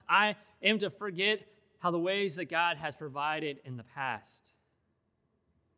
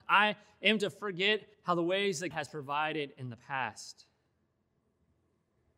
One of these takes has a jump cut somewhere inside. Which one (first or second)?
second